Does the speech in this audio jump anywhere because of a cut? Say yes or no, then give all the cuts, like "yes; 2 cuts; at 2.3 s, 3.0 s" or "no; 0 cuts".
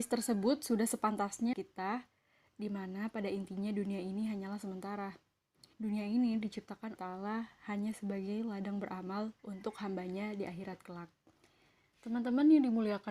yes; 4 cuts; at 1.5 s, 5.7 s, 7.0 s, 9.4 s